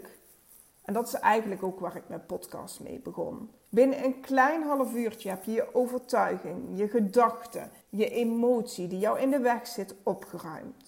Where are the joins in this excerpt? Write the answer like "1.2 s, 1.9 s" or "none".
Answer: 3.6 s, 7.8 s